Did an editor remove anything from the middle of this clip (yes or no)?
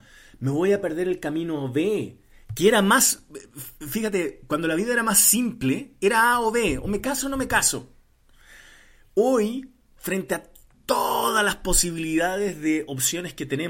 no